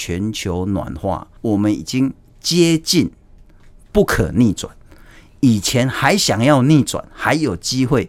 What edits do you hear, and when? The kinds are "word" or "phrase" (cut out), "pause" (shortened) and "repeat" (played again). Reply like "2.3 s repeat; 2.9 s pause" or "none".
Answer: 1.4 s pause